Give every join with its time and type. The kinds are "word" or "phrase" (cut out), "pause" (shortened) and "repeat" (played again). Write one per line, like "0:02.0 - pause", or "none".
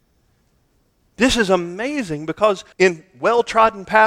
0:02.7 - pause